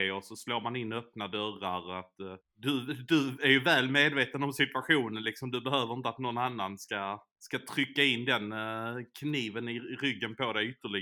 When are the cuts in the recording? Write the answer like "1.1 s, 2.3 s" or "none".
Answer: 2.4 s, 7.3 s